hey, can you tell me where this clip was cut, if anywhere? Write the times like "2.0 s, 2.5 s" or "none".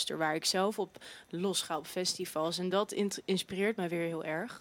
none